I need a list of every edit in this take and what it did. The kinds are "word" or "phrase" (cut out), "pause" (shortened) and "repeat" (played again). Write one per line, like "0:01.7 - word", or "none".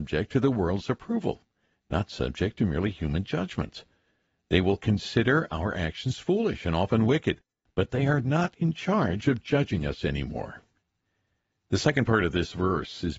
none